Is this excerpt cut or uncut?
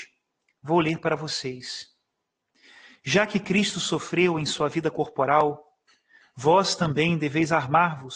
uncut